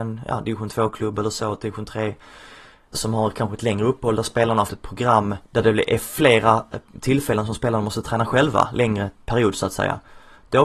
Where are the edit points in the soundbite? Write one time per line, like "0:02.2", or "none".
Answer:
0:02.9
0:04.7
0:05.4